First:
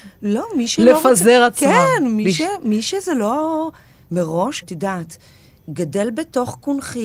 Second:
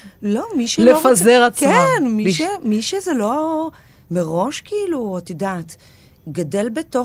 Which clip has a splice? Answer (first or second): first